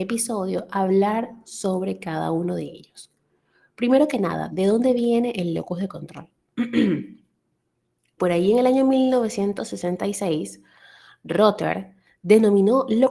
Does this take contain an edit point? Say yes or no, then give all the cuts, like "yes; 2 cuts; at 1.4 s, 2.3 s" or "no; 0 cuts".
yes; 1 cut; at 8.2 s